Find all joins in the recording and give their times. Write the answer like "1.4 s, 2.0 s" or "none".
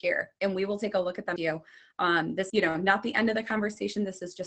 1.4 s, 2.5 s

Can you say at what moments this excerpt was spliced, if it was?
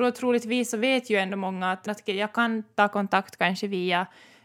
1.9 s

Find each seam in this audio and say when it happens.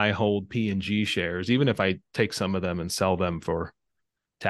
2.0 s

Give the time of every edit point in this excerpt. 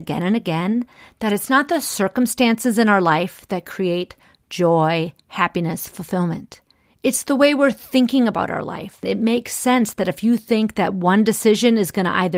none

